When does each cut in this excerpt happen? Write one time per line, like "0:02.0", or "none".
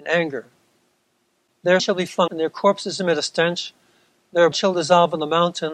0:01.8
0:02.3
0:04.5